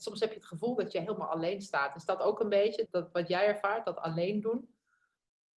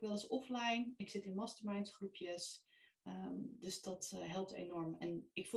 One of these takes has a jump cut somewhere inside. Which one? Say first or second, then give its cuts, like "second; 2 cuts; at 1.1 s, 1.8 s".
first; 1 cut; at 2.9 s